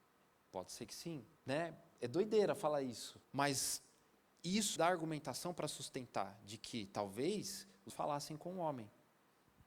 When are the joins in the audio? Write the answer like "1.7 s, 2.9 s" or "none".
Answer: 1.4 s, 3.2 s, 4.8 s, 7.9 s